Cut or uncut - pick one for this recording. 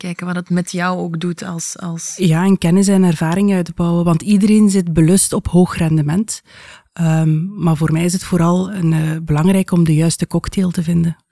uncut